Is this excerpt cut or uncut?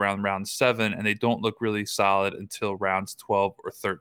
uncut